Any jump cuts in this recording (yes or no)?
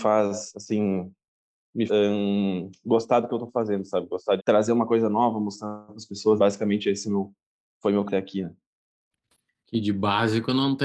yes